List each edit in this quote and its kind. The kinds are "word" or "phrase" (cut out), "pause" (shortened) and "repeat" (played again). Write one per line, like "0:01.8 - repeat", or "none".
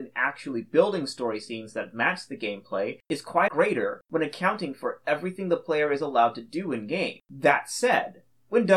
0:03.5 - phrase
0:07.2 - pause